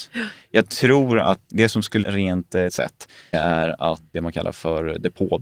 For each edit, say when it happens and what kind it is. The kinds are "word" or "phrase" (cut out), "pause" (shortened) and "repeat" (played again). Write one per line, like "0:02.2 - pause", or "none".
0:01.5 - word
0:02.0 - word
0:02.7 - word
0:03.3 - word
0:04.1 - word